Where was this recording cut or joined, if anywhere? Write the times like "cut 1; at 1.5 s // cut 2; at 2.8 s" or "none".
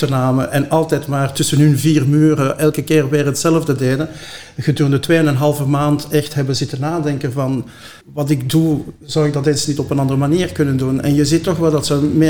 cut 1; at 8.0 s